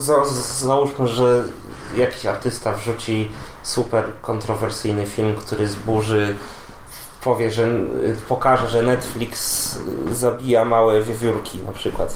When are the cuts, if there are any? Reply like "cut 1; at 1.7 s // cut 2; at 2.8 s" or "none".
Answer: none